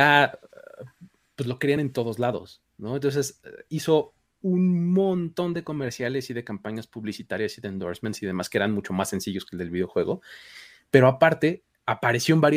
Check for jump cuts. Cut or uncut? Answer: uncut